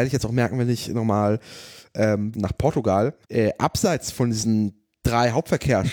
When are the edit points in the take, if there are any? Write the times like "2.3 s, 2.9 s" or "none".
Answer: 2.3 s, 3.2 s